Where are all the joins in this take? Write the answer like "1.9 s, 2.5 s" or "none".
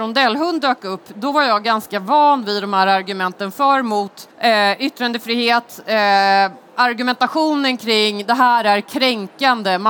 4.3 s